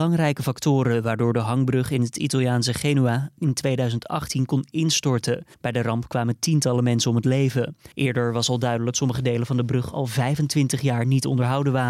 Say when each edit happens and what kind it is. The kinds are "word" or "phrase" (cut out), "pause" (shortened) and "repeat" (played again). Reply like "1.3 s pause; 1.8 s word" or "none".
5.5 s pause; 7.9 s pause; 8.9 s word